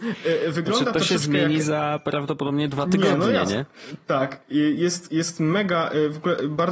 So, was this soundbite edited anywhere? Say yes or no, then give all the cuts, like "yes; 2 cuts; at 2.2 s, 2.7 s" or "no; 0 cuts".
no; 0 cuts